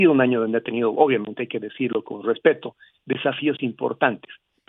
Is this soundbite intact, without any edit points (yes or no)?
yes